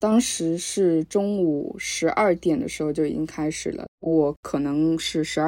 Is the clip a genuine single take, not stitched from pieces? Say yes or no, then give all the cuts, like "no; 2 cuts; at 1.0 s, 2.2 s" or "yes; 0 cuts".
no; 1 cut; at 3.9 s